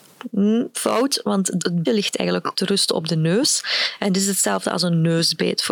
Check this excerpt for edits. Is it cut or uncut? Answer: cut